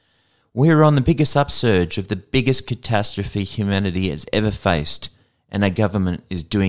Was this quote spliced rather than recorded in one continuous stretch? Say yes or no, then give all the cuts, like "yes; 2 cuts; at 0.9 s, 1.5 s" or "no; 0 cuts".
no; 0 cuts